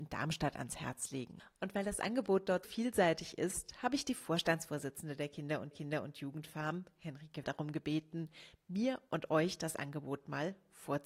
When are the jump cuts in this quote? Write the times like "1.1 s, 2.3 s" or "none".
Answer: 2.6 s, 5.7 s, 7.4 s